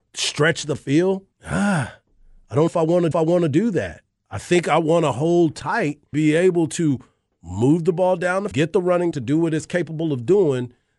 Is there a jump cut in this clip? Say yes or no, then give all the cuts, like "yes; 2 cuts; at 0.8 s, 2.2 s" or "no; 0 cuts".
yes; 6 cuts; at 1.3 s, 2.7 s, 3.1 s, 6.1 s, 8.5 s, 9.1 s